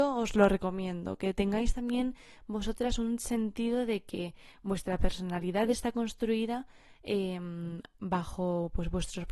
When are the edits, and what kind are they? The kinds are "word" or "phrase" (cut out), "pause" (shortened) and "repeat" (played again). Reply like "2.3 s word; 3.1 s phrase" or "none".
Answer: none